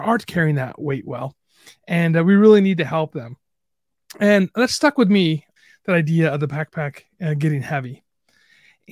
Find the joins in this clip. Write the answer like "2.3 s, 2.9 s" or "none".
none